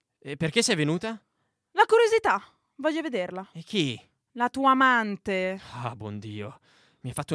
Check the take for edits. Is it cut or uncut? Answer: uncut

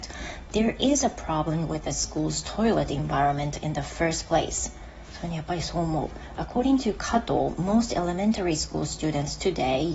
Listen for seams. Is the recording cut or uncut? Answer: uncut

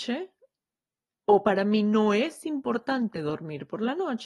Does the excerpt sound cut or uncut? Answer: uncut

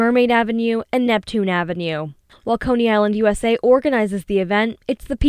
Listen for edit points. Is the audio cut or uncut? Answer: uncut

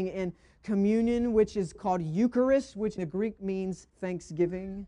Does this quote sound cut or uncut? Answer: cut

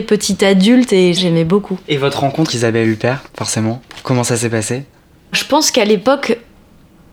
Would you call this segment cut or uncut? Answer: cut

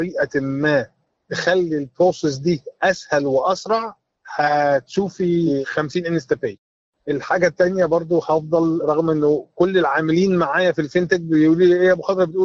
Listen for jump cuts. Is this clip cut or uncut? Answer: uncut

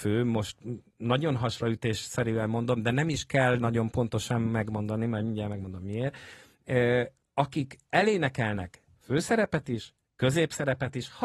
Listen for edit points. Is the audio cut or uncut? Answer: uncut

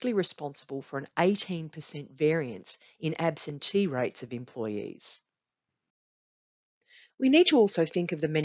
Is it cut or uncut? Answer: uncut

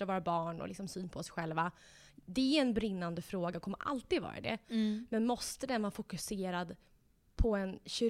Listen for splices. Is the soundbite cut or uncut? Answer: uncut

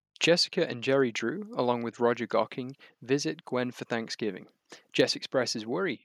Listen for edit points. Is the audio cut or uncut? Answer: uncut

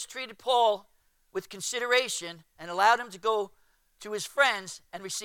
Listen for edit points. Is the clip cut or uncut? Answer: uncut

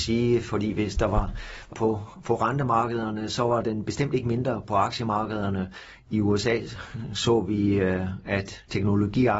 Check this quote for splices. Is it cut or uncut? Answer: cut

